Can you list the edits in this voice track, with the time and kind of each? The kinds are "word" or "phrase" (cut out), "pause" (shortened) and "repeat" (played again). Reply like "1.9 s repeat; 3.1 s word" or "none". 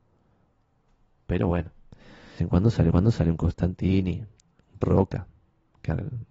2.4 s phrase; 2.9 s repeat; 4.8 s word